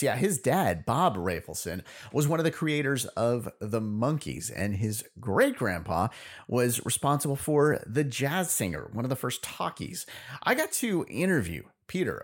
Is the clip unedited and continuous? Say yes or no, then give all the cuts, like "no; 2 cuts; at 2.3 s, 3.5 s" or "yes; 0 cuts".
yes; 0 cuts